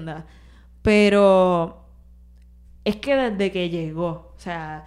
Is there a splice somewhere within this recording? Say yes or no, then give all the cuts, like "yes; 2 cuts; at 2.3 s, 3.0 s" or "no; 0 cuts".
no; 0 cuts